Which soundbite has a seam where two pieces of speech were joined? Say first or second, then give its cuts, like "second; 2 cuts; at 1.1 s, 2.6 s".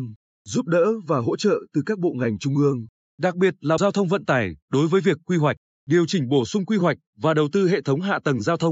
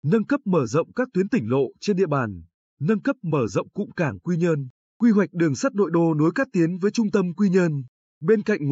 first; 1 cut; at 3.8 s